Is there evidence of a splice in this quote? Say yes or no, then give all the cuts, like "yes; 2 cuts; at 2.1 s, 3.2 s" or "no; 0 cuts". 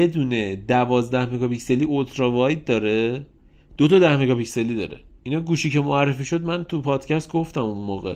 no; 0 cuts